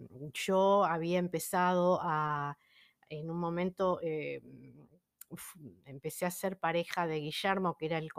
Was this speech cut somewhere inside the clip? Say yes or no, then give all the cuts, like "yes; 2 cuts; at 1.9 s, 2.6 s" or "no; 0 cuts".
no; 0 cuts